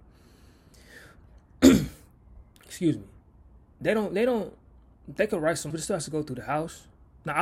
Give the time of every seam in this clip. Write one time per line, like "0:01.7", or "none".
0:05.7